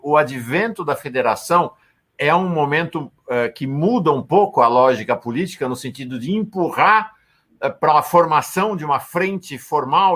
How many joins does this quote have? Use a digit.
0